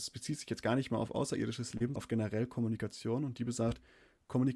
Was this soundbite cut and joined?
yes; 1 cut; at 2.0 s

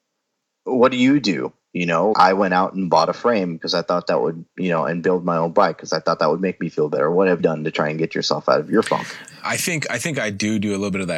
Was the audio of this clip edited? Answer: yes; 3 cuts; at 2.1 s, 7.4 s, 9.4 s

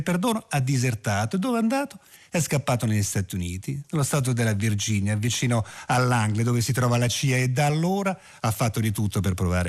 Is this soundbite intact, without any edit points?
yes; 0 cuts

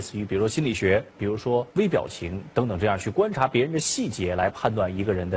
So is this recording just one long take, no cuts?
no; 2 cuts; at 1.1 s, 1.7 s

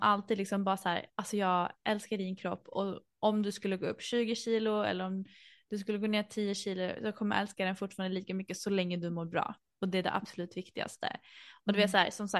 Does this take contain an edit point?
no; 0 cuts

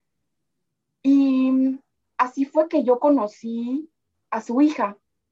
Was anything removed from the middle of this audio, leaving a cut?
no; 0 cuts

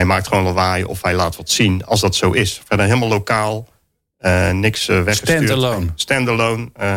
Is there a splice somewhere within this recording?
no; 0 cuts

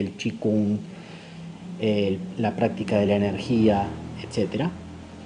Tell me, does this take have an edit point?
no; 0 cuts

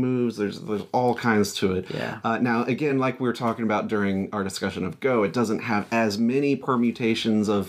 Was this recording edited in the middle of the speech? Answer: no; 0 cuts

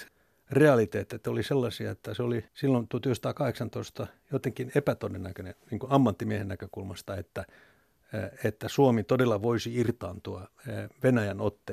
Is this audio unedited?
no; 1 cut; at 2.5 s

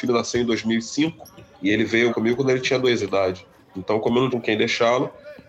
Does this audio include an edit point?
yes; 5 cuts; at 1.5 s, 2.1 s, 3.0 s, 3.6 s, 4.3 s

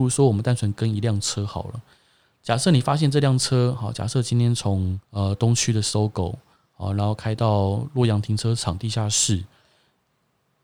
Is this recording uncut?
no; 1 cut; at 5.0 s

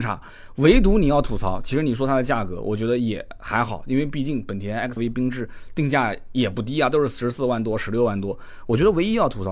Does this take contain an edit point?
yes; 1 cut; at 5.0 s

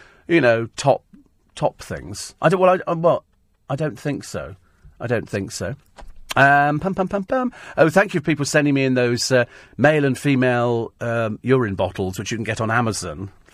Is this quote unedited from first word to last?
yes; 0 cuts

